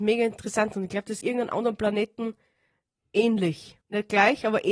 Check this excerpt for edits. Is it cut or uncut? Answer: cut